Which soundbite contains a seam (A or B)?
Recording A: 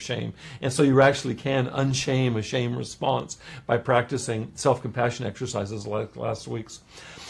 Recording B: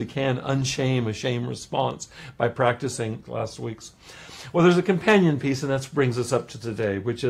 B